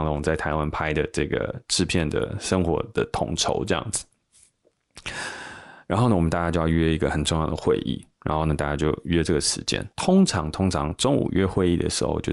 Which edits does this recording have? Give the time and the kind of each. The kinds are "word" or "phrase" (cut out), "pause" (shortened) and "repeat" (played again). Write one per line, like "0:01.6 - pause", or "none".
0:09.9 - pause